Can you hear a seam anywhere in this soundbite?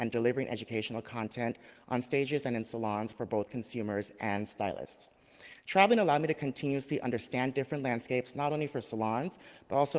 no; 0 cuts

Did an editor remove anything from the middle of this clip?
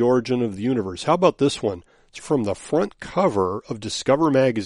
yes; 1 cut; at 2.2 s

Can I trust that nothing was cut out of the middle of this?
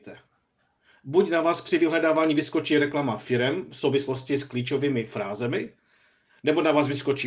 yes; 0 cuts

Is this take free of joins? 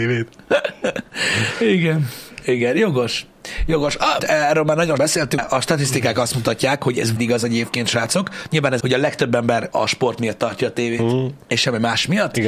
no; 6 cuts; at 4.2 s, 5.0 s, 5.4 s, 7.2 s, 8.8 s, 9.7 s

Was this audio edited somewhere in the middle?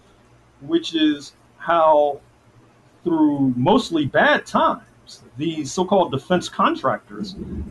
no; 0 cuts

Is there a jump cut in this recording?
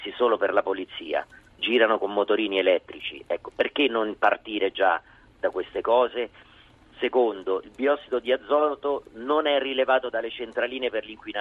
yes; 1 cut; at 1.6 s

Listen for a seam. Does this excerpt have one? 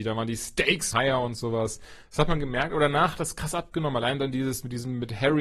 yes; 1 cut; at 0.9 s

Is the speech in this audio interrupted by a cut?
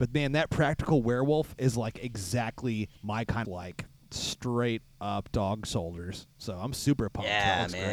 yes; 2 cuts; at 3.0 s, 3.4 s

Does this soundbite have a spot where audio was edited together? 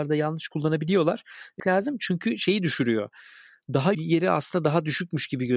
yes; 2 cuts; at 1.6 s, 3.9 s

